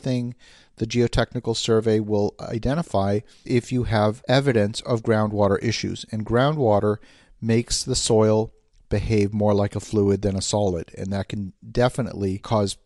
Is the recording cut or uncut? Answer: cut